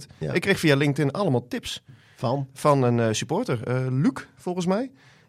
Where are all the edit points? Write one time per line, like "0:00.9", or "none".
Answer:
none